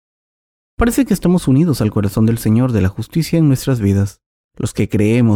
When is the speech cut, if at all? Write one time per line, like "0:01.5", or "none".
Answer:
0:04.4